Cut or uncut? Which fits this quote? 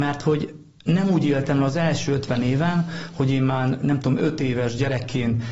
uncut